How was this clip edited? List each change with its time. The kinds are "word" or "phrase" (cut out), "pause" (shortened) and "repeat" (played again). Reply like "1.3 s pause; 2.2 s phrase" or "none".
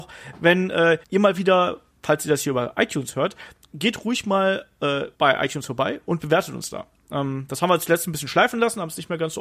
1.0 s pause; 5.1 s pause